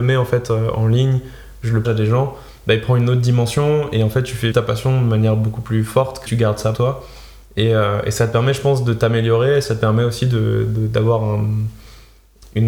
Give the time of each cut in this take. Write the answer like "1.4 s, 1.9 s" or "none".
1.8 s, 4.5 s, 6.3 s, 6.7 s